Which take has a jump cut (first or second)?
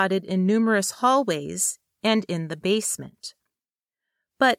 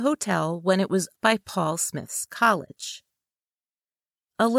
second